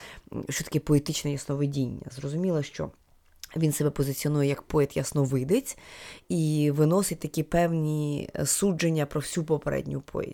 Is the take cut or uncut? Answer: uncut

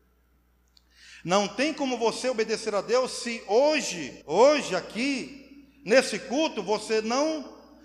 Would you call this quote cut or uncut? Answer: cut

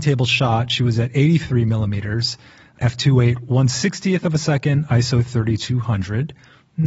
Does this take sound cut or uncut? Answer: uncut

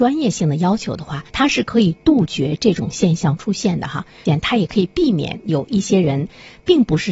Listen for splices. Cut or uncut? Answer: cut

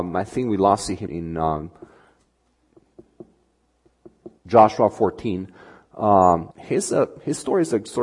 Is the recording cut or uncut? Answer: cut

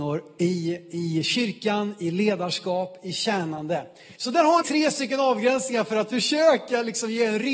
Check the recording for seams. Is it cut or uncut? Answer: cut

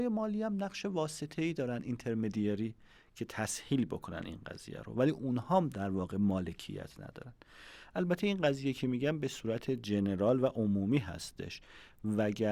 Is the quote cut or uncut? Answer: uncut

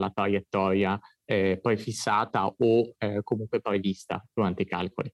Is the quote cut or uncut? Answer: uncut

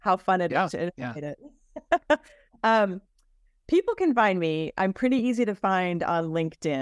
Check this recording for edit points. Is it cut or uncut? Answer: uncut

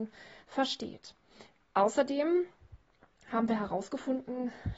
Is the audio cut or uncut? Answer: uncut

